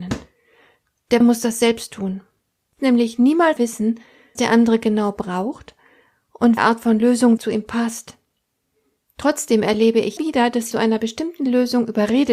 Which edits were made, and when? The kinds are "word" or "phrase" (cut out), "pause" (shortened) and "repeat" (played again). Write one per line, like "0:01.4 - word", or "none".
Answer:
0:01.2 - word
0:02.8 - word
0:03.6 - word
0:04.4 - word
0:06.6 - word
0:07.4 - word
0:10.2 - word
0:10.7 - word